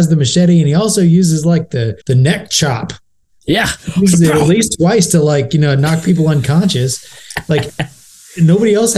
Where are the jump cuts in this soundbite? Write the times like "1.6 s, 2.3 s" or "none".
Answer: 2.0 s